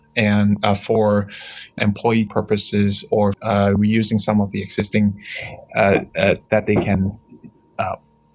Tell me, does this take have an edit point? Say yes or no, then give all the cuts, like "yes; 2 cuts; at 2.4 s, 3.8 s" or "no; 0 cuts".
yes; 4 cuts; at 1.8 s, 2.3 s, 3.3 s, 6.5 s